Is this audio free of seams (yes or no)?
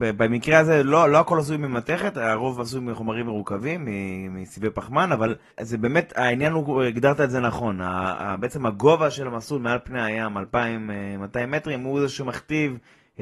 no